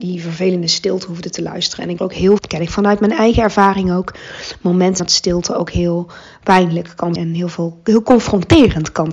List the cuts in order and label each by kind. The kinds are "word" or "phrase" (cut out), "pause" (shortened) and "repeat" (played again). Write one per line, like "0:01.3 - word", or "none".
0:02.0 - phrase
0:02.4 - word
0:05.0 - word
0:07.2 - word